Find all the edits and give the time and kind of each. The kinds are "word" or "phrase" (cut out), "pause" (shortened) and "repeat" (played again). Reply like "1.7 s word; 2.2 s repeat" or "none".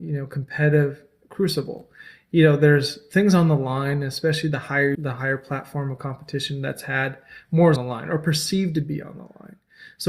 4.9 s phrase; 7.8 s word